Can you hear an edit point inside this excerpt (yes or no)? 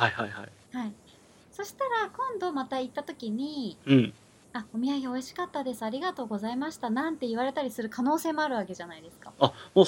no